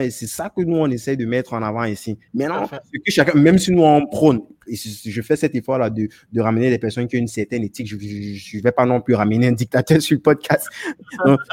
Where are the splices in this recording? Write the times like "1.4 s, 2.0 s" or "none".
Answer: 2.3 s